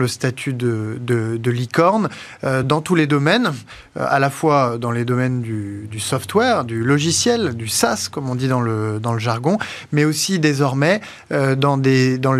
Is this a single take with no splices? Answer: yes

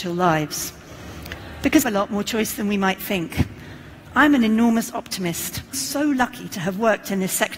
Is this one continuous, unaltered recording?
no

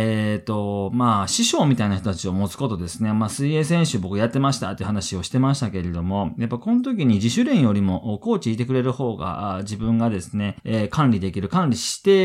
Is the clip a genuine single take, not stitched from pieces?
no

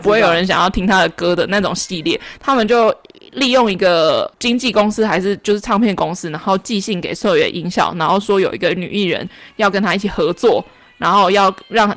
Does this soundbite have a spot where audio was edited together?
no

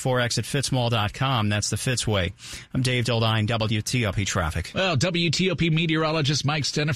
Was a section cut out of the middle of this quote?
no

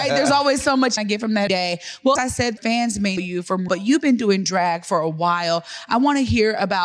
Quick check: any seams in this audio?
yes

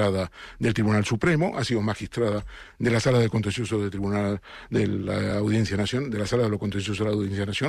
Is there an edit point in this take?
no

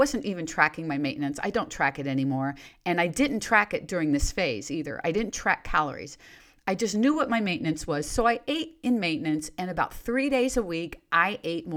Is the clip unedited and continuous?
yes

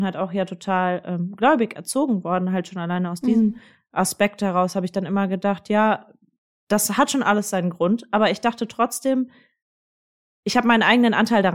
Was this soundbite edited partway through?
no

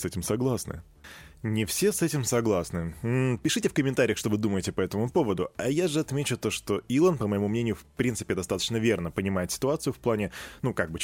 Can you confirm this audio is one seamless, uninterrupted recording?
yes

